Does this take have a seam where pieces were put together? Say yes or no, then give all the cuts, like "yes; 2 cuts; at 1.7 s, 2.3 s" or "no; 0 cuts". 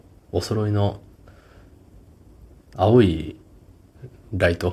no; 0 cuts